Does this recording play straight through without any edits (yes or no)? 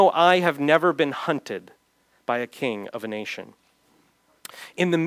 yes